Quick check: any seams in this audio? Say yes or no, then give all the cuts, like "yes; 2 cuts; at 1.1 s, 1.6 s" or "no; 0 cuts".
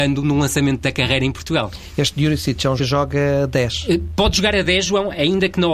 yes; 1 cut; at 2.8 s